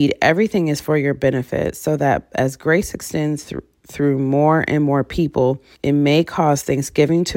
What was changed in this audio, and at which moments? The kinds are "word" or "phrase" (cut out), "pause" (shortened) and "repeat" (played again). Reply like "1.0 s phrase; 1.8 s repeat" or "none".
5.7 s pause